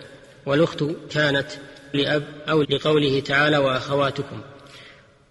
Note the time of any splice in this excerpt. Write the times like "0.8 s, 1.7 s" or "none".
1.1 s, 1.9 s, 2.6 s